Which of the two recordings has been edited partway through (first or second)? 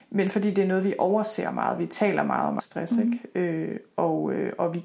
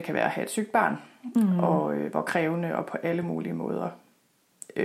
first